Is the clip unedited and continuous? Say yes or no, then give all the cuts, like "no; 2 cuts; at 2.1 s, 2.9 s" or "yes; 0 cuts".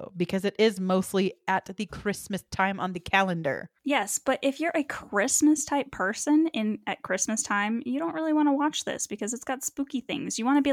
no; 1 cut; at 3.8 s